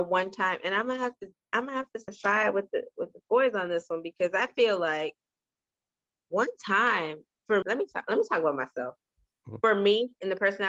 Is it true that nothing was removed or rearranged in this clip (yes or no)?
no